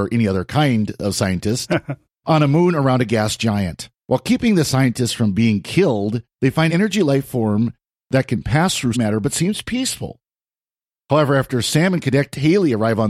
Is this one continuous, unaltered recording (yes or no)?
no